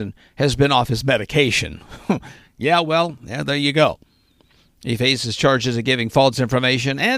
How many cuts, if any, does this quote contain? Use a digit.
0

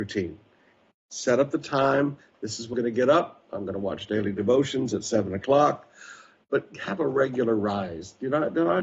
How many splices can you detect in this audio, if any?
1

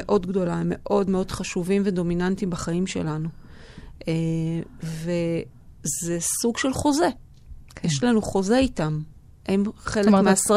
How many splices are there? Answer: 0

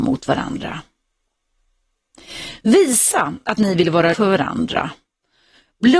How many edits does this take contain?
1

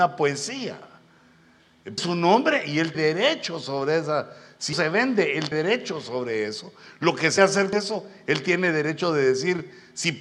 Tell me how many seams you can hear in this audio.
6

